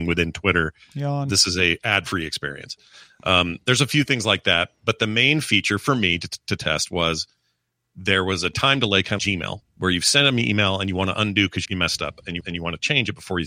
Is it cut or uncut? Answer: cut